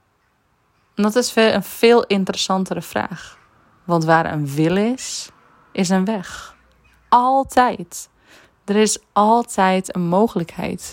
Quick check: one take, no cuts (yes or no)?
yes